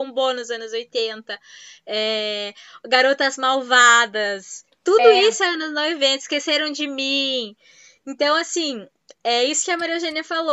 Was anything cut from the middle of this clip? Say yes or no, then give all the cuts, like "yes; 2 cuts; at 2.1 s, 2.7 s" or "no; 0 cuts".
no; 0 cuts